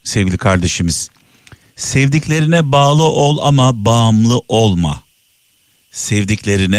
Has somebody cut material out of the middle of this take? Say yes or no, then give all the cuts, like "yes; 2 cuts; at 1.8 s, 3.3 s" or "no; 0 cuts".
no; 0 cuts